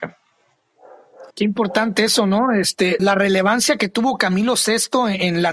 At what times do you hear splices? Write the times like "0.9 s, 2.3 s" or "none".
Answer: 1.3 s, 3.0 s